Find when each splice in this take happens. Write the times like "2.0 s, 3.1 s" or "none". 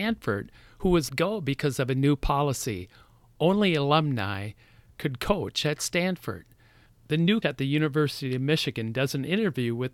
1.1 s, 7.4 s